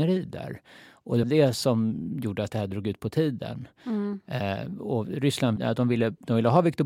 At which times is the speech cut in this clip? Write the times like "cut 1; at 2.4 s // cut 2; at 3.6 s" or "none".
cut 1; at 1.2 s // cut 2; at 5.6 s